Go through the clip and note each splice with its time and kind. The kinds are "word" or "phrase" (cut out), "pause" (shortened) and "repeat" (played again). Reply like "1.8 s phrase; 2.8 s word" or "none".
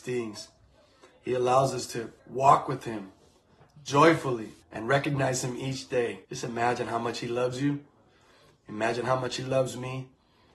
2.2 s pause; 4.6 s pause; 6.2 s pause